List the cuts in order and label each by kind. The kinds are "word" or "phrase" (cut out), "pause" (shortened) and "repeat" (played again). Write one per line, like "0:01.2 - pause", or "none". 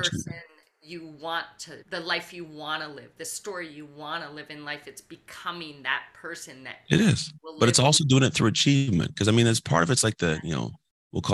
0:01.8 - pause
0:07.4 - pause